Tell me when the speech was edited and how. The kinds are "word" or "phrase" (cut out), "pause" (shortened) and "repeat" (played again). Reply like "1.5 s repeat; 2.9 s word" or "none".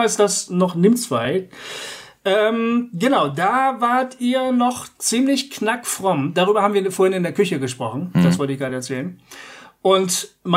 none